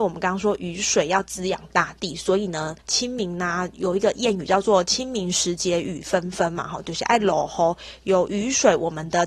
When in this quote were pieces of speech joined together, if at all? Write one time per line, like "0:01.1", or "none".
0:02.8